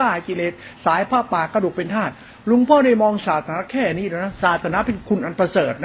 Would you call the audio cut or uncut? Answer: uncut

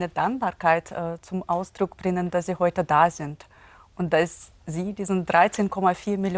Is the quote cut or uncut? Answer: uncut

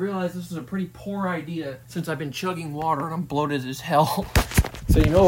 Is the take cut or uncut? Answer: cut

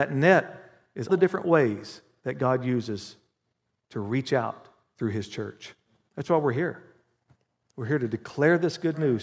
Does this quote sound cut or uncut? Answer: cut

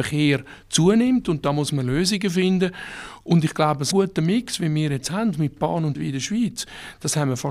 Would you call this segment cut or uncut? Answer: cut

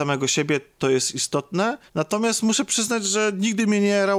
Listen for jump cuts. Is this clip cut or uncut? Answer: cut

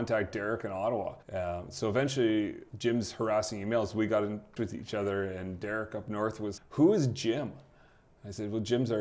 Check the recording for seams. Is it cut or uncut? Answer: cut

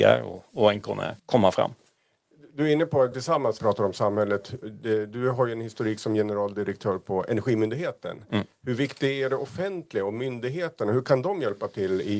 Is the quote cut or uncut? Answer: cut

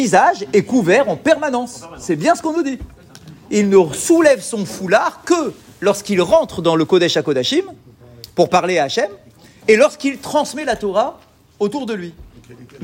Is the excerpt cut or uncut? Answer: uncut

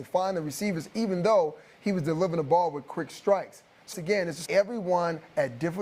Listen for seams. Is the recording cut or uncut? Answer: cut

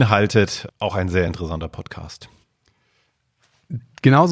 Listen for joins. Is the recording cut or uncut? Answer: uncut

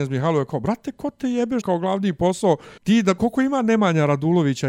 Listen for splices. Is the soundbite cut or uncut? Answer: cut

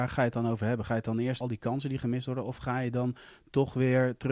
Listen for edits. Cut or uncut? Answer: cut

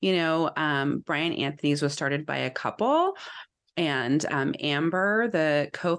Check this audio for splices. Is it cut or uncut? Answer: uncut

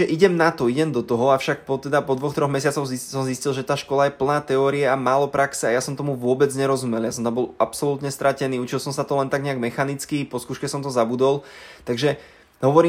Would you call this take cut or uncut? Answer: uncut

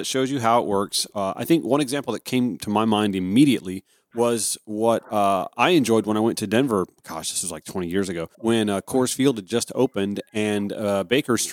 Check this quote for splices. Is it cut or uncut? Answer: cut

